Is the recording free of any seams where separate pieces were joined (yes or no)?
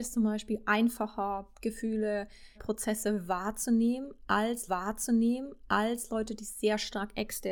no